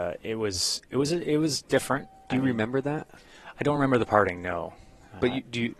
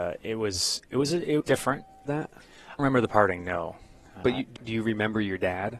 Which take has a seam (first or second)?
second